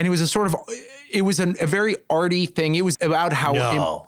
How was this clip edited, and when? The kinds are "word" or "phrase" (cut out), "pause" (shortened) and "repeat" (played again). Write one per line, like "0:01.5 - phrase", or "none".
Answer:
0:02.9 - word